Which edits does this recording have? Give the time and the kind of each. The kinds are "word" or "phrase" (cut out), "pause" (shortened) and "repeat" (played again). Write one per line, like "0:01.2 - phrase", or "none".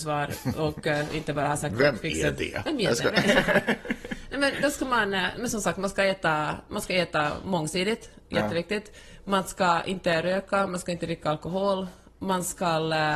none